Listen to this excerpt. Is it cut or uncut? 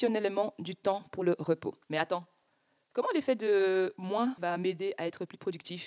cut